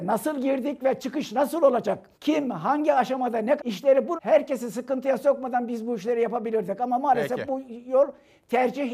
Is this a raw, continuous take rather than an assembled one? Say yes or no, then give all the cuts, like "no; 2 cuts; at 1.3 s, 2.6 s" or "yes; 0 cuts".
no; 3 cuts; at 2.1 s, 3.6 s, 4.2 s